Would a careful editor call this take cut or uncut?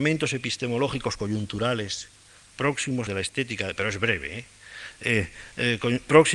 cut